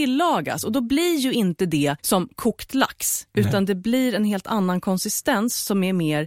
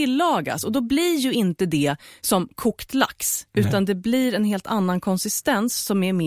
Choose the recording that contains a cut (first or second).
first